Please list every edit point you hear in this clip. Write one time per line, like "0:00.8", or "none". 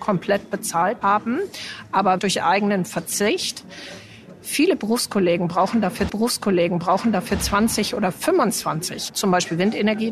0:01.0
0:02.2
0:06.1
0:09.1